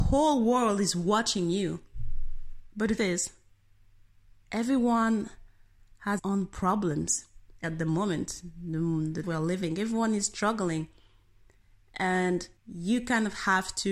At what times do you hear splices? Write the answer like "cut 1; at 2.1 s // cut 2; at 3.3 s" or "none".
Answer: cut 1; at 3.0 s // cut 2; at 6.2 s // cut 3; at 7.6 s // cut 4; at 9.2 s // cut 5; at 12.6 s